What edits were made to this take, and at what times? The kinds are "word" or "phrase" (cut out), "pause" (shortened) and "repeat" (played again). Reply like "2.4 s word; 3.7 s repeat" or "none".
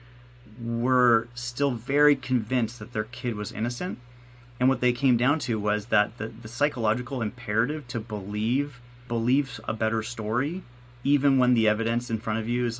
9.1 s word